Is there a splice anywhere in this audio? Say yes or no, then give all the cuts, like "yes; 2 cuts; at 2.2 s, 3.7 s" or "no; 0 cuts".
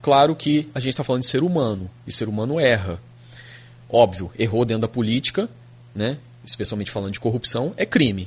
no; 0 cuts